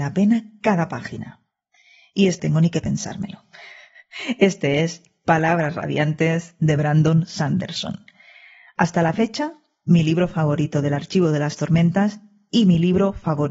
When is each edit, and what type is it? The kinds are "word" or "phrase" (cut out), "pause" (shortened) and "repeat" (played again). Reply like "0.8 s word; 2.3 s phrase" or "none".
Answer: 2.4 s word